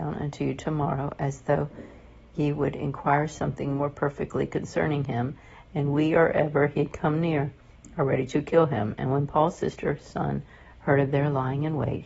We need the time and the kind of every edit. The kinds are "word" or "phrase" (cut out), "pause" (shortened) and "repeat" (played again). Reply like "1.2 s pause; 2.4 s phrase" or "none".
none